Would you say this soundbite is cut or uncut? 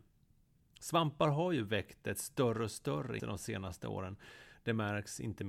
cut